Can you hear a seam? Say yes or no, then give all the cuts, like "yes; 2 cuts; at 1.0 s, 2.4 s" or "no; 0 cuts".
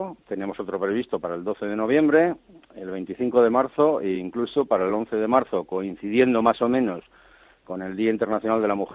no; 0 cuts